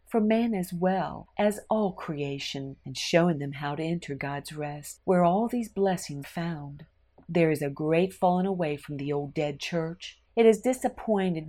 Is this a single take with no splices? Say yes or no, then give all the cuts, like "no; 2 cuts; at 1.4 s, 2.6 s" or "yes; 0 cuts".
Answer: no; 2 cuts; at 6.2 s, 10.3 s